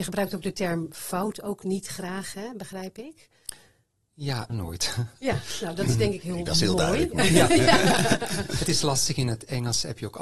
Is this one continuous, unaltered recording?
no; 2 cuts; at 4.5 s, 6.2 s

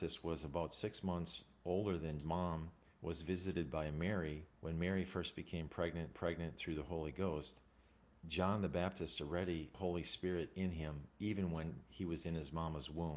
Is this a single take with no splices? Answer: no; 4 cuts; at 2.2 s, 4.5 s, 6.1 s, 9.7 s

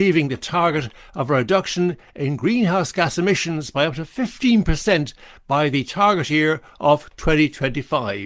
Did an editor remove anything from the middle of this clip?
no; 0 cuts

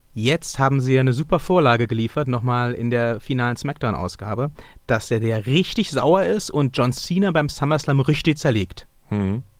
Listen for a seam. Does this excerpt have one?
no; 0 cuts

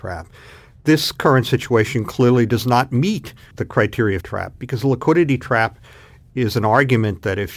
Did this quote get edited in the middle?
yes; 2 cuts; at 3.5 s, 4.2 s

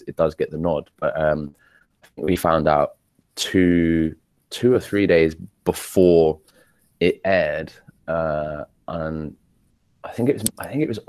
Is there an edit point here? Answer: no; 0 cuts

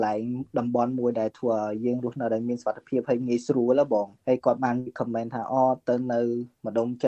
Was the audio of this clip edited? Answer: yes; 1 cut; at 4.2 s

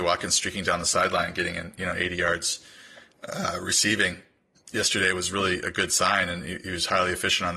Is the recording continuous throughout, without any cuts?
yes; 0 cuts

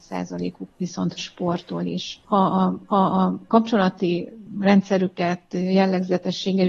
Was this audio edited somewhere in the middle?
yes; 2 cuts; at 1.2 s, 2.9 s

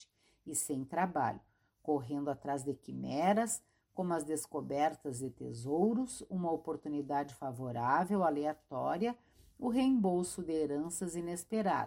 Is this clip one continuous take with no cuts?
yes; 0 cuts

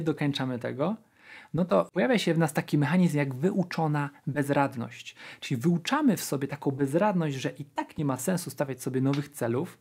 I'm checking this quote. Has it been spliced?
no; 0 cuts

